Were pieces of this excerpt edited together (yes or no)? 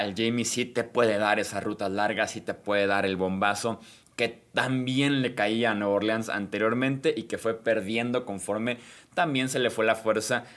no